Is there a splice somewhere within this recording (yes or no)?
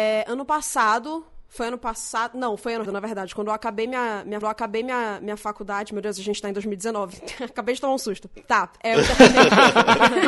yes